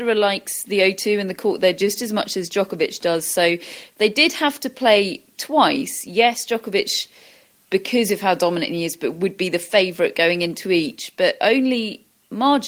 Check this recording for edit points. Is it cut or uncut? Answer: uncut